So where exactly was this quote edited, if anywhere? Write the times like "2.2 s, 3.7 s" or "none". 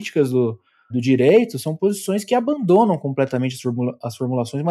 0.9 s